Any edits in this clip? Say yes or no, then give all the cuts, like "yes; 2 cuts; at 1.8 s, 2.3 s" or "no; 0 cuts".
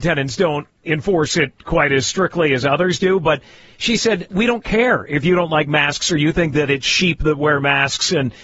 no; 0 cuts